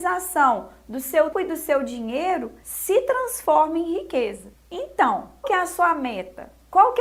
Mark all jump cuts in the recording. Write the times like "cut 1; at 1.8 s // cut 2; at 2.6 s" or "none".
cut 1; at 1.3 s // cut 2; at 5.4 s

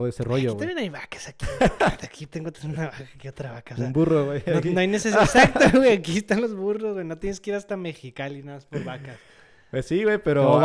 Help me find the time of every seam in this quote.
none

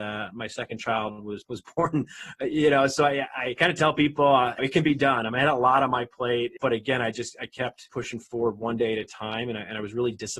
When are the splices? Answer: cut 1; at 6.6 s // cut 2; at 7.9 s

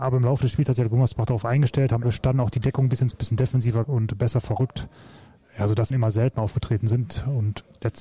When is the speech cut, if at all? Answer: cut 1; at 2.0 s // cut 2; at 3.1 s // cut 3; at 3.8 s // cut 4; at 5.9 s

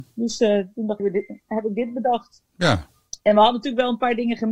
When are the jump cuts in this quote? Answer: cut 1; at 1.0 s // cut 2; at 2.5 s

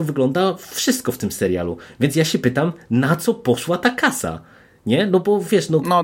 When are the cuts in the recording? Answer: none

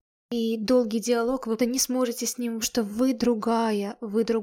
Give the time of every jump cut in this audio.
cut 1; at 1.6 s // cut 2; at 2.6 s

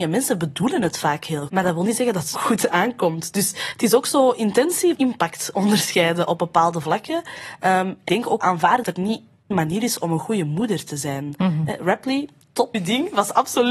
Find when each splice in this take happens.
cut 1; at 1.5 s // cut 2; at 2.3 s // cut 3; at 4.9 s // cut 4; at 8.1 s // cut 5; at 8.4 s // cut 6; at 8.8 s // cut 7; at 9.5 s // cut 8; at 12.7 s

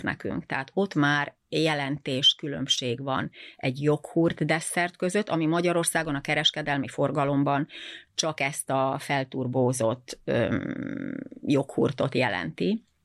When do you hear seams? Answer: none

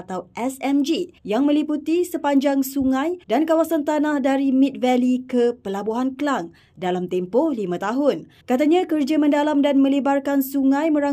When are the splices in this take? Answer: cut 1; at 1.2 s // cut 2; at 3.2 s // cut 3; at 8.4 s

